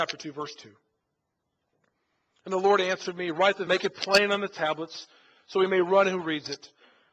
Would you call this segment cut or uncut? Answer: cut